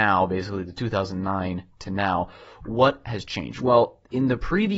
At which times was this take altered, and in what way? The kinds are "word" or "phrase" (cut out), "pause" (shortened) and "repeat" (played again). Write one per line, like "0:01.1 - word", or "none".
none